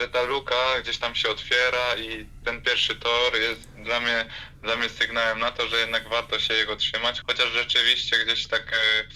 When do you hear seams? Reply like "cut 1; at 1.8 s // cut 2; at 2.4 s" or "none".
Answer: cut 1; at 7.2 s